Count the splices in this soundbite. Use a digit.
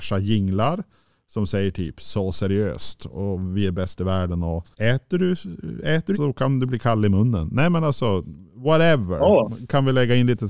2